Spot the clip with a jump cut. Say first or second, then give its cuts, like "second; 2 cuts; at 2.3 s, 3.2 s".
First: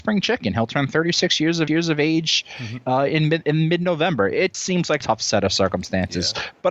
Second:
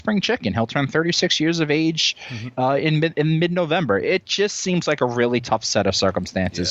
first; 3 cuts; at 1.7 s, 4.5 s, 5.0 s